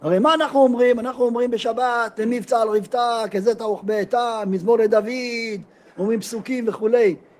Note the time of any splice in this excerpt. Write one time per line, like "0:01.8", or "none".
none